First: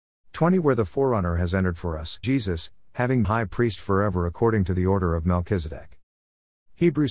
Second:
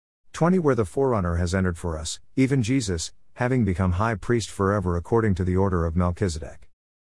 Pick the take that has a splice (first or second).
first